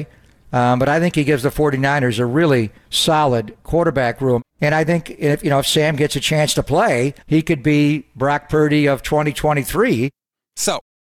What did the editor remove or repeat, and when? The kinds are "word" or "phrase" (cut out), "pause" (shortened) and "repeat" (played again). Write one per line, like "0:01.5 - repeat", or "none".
0:02.8 - pause
0:04.5 - pause
0:07.2 - pause

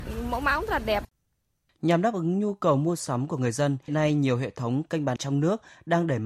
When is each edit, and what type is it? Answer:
0:03.9 - word
0:05.2 - word

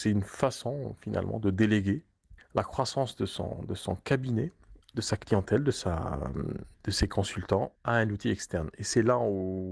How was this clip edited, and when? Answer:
0:02.4 - pause
0:04.8 - pause
0:06.7 - pause
0:07.8 - pause

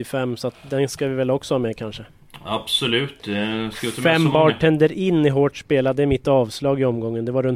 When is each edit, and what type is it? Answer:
none

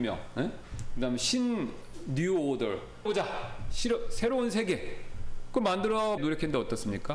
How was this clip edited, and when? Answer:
0:03.1 - phrase
0:06.2 - word

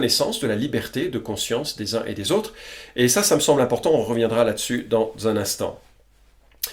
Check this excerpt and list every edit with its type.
none

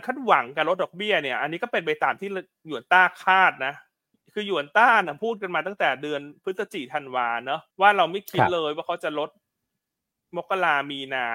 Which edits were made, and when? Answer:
0:04.1 - pause
0:07.7 - pause

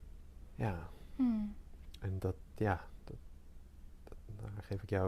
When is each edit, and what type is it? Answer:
0:02.2 - word

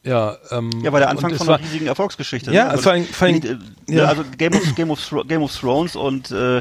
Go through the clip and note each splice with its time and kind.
none

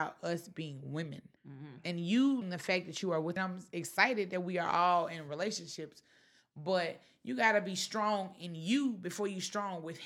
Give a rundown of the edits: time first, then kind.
0:01.4 - pause
0:02.4 - word
0:03.4 - phrase

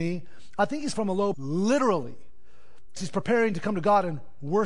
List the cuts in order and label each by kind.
0:00.9 - word
0:01.3 - word
0:03.0 - word

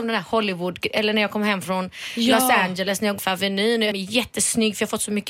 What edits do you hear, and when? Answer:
0:03.2 - word
0:03.9 - word

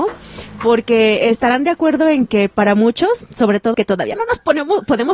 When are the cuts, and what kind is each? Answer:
0:03.7 - word

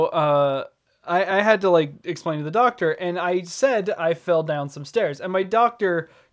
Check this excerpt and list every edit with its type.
none

